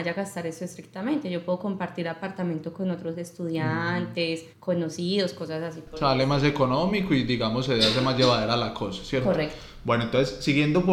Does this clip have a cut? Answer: yes; 1 cut; at 4.5 s

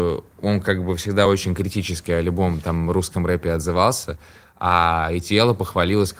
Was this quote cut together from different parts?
no; 0 cuts

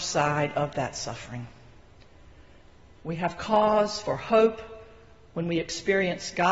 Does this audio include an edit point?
no; 0 cuts

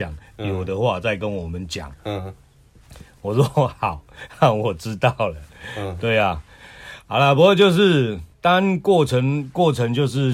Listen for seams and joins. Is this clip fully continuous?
no; 1 cut; at 8.3 s

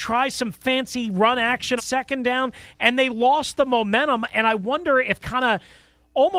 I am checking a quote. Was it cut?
yes; 2 cuts; at 1.8 s, 5.2 s

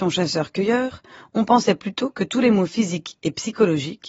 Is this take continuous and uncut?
yes; 0 cuts

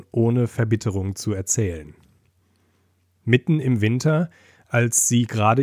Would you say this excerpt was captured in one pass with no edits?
yes; 0 cuts

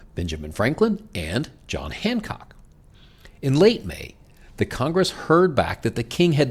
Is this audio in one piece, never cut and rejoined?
yes; 0 cuts

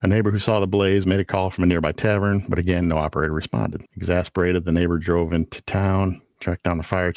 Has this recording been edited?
yes; 1 cut; at 3.9 s

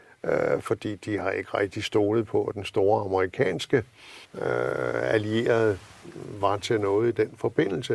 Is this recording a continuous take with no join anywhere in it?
no; 1 cut; at 4.2 s

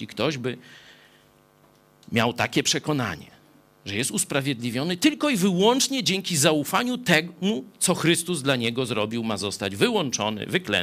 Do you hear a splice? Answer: no; 0 cuts

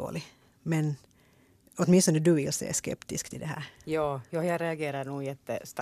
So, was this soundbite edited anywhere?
no; 0 cuts

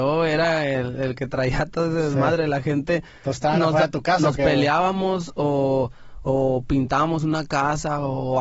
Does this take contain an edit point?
no; 0 cuts

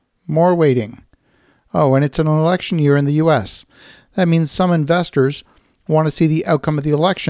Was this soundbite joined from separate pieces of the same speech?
no; 0 cuts

